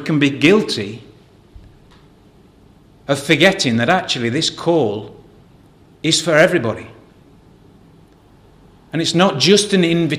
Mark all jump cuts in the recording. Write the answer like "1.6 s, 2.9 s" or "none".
none